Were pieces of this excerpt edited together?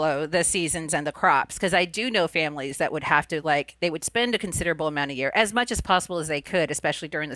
no; 0 cuts

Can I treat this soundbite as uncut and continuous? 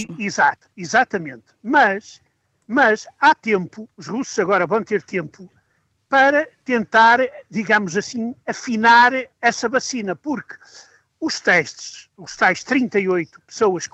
yes; 0 cuts

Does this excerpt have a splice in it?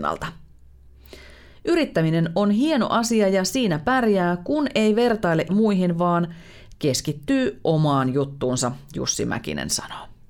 yes; 1 cut; at 5.5 s

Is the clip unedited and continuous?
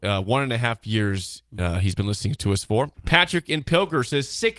no; 1 cut; at 2.9 s

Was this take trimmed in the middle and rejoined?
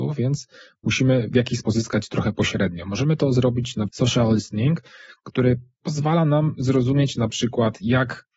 yes; 2 cuts; at 1.6 s, 3.9 s

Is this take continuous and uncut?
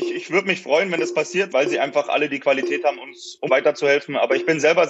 no; 2 cuts; at 1.5 s, 3.5 s

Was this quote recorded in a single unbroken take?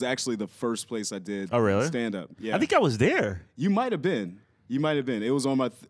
yes; 0 cuts

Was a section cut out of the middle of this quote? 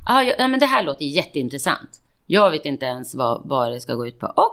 no; 0 cuts

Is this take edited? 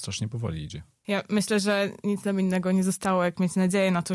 no; 0 cuts

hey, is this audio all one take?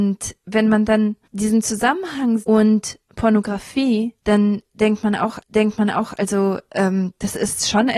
no; 4 cuts; at 1.2 s, 2.4 s, 4.2 s, 5.4 s

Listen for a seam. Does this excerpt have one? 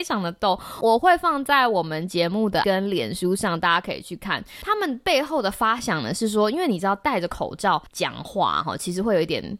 yes; 2 cuts; at 2.6 s, 7.9 s

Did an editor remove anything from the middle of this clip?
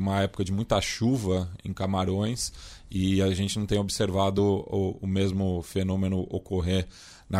no; 0 cuts

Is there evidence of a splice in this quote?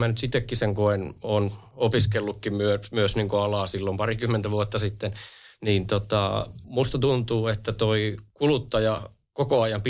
no; 0 cuts

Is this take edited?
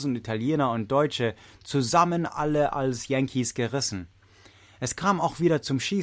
no; 0 cuts

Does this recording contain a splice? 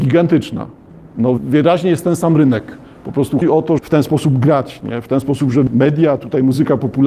yes; 4 cuts; at 1.4 s, 3.4 s, 3.8 s, 5.7 s

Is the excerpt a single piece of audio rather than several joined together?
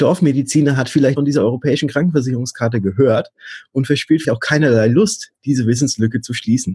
no; 2 cuts; at 1.2 s, 4.2 s

